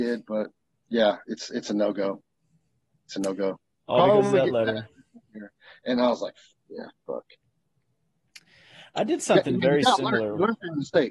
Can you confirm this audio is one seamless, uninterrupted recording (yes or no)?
yes